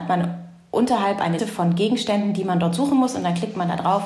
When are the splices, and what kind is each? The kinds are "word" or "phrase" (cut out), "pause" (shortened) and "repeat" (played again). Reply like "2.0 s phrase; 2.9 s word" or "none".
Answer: 1.4 s word